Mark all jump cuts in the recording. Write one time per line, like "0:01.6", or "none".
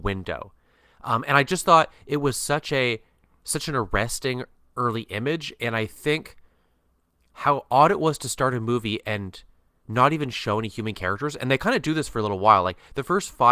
none